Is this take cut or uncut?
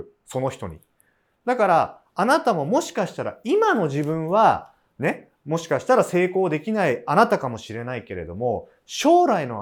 uncut